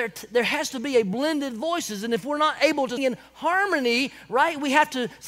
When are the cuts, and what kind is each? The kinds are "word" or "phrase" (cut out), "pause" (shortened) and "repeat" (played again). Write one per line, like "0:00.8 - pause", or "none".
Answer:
0:03.0 - word